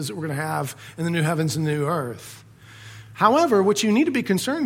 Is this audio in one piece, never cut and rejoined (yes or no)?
yes